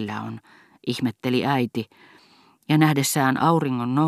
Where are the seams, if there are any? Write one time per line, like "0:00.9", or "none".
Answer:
none